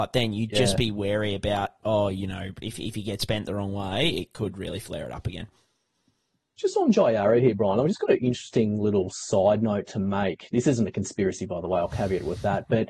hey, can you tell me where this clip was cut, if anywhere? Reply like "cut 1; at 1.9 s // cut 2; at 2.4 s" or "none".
none